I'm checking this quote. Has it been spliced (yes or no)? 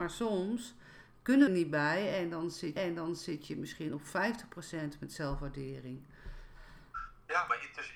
yes